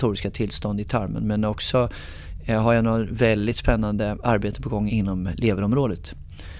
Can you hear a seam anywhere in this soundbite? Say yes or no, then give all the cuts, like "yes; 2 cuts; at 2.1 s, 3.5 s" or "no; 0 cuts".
yes; 1 cut; at 4.9 s